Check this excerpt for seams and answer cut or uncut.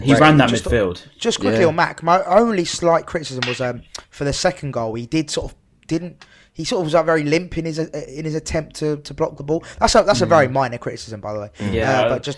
cut